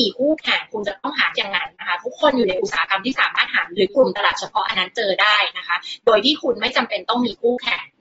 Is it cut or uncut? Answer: cut